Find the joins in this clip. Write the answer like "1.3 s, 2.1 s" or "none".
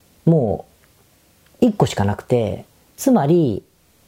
none